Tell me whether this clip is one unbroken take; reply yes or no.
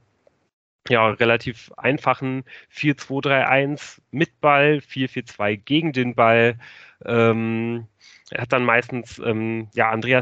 yes